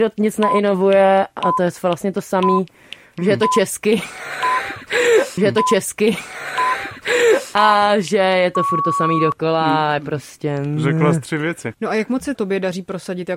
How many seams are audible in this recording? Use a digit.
2